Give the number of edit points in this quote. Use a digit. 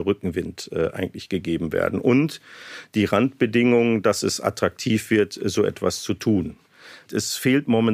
0